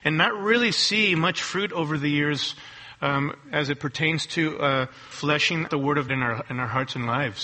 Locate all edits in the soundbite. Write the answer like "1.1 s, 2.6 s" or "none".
5.1 s, 5.7 s, 6.1 s